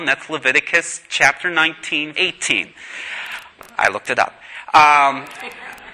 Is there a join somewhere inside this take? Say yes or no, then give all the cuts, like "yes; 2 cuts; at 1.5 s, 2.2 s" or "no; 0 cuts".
yes; 1 cut; at 2.1 s